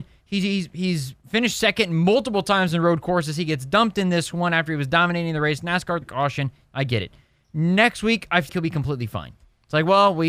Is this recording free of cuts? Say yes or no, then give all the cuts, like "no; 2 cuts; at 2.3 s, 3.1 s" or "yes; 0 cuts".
no; 2 cuts; at 6.0 s, 8.5 s